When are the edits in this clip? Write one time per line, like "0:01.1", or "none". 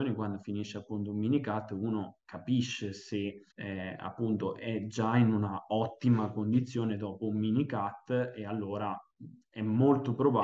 0:03.5